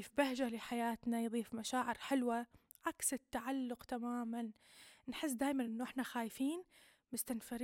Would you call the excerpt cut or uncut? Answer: uncut